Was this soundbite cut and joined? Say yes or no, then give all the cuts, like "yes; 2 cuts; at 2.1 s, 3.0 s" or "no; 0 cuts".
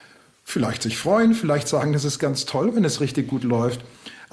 no; 0 cuts